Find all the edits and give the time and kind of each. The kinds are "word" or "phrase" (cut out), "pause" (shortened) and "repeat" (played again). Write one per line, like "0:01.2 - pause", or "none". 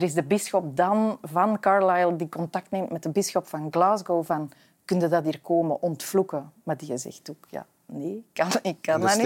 none